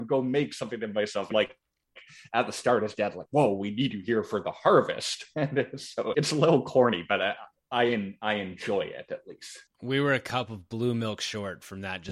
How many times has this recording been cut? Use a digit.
2